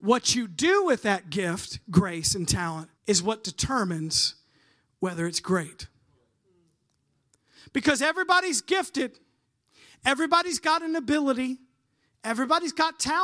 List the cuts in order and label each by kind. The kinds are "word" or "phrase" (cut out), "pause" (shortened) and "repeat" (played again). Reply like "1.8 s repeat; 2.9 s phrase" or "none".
3.0 s pause